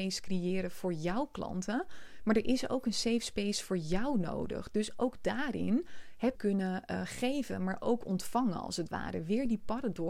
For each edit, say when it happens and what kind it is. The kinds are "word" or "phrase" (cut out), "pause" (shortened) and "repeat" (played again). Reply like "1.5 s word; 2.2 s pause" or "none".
6.3 s phrase